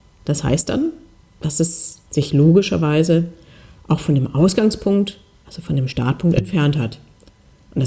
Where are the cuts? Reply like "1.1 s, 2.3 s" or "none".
2.1 s